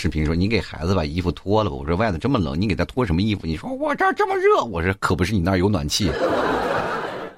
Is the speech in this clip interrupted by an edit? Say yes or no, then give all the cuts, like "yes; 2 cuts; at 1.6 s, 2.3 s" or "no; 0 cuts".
no; 0 cuts